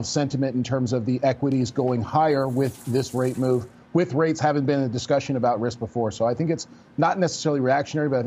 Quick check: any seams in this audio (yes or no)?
no